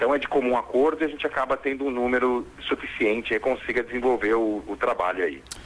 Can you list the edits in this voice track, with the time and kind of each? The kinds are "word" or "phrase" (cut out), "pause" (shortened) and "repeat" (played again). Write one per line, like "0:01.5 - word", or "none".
0:03.4 - phrase